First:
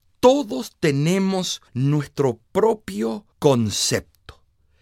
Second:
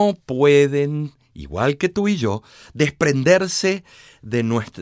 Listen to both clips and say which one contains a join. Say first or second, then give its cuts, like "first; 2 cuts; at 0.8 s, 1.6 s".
first; 2 cuts; at 1.7 s, 3.3 s